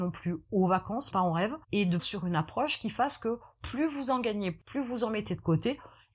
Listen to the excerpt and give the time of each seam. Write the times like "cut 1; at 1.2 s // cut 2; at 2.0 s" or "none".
cut 1; at 1.1 s // cut 2; at 1.6 s // cut 3; at 2.0 s